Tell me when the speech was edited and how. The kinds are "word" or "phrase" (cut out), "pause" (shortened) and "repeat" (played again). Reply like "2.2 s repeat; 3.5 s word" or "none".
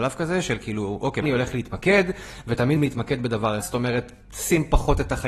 1.2 s word; 2.8 s word; 3.6 s word